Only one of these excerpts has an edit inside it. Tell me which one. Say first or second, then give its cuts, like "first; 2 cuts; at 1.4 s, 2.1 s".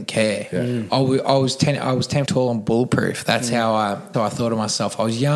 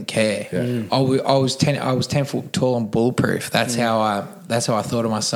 first; 2 cuts; at 2.3 s, 4.1 s